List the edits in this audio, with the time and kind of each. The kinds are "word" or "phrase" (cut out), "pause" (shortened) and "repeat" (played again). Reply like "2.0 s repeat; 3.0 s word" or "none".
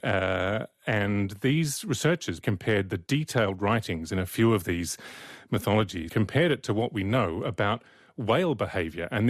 2.4 s word; 6.1 s word